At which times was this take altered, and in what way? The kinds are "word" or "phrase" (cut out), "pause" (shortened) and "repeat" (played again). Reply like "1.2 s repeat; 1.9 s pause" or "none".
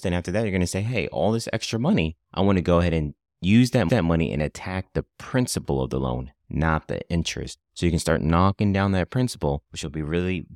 2.2 s pause; 3.9 s repeat; 7.7 s pause; 9.7 s pause